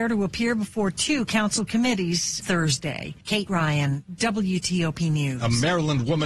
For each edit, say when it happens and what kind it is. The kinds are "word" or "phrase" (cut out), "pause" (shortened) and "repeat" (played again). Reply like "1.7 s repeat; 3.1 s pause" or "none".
2.4 s word; 3.2 s pause